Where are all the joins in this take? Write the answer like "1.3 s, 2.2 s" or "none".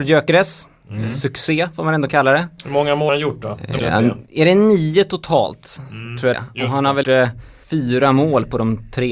3.1 s, 3.8 s, 6.3 s, 7.0 s, 7.6 s